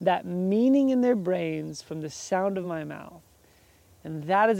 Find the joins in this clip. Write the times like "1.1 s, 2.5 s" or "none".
none